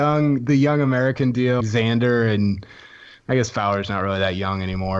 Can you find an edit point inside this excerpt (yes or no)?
yes